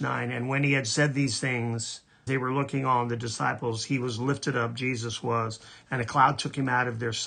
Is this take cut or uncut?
cut